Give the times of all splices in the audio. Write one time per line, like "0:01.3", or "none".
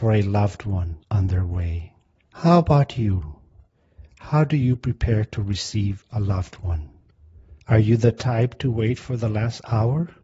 0:01.0
0:02.1
0:07.6